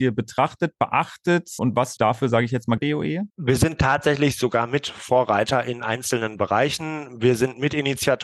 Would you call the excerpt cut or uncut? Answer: cut